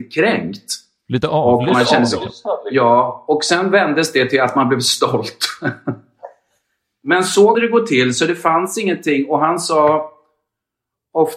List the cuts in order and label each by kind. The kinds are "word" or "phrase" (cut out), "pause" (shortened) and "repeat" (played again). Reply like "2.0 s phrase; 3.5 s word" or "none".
7.5 s word